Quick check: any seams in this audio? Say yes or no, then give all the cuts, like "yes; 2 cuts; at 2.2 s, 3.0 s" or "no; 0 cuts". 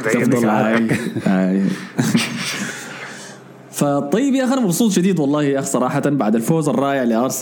no; 0 cuts